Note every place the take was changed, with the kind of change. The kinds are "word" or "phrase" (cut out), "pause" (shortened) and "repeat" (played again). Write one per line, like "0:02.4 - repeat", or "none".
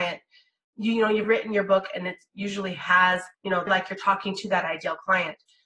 0:01.2 - word
0:03.3 - pause
0:03.7 - phrase